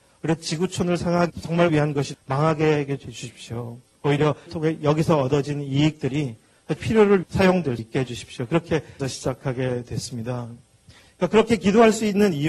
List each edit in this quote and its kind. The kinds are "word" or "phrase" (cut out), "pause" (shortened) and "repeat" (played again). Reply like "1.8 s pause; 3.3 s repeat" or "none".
1.3 s word; 1.7 s word; 2.1 s word; 4.5 s word; 6.8 s word; 7.2 s word; 7.8 s word; 9.0 s word